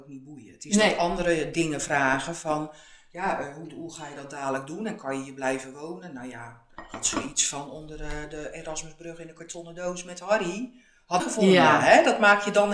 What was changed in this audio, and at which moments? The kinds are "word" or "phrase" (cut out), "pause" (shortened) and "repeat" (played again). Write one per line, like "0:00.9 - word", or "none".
0:11.2 - phrase